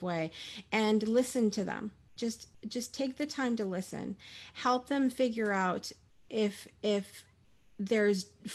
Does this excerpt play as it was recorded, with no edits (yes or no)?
yes